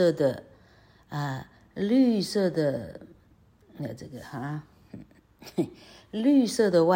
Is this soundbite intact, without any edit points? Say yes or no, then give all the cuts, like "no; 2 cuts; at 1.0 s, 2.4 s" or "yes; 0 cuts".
yes; 0 cuts